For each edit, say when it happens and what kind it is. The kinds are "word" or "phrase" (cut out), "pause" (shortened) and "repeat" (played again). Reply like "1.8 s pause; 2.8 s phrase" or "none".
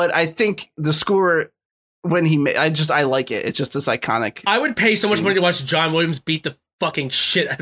none